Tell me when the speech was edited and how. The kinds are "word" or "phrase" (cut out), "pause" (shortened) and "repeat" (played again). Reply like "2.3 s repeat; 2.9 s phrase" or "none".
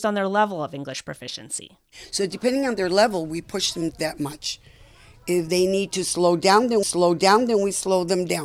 3.9 s word; 6.8 s repeat